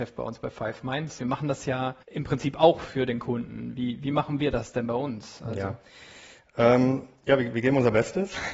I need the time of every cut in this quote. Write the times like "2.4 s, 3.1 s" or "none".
1.2 s, 2.0 s